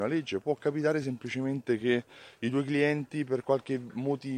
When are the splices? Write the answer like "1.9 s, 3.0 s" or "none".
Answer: none